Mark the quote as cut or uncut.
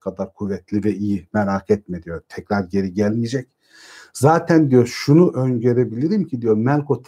uncut